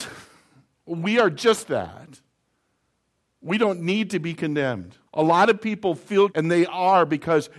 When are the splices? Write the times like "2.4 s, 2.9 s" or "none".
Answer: 1.6 s, 5.1 s, 6.3 s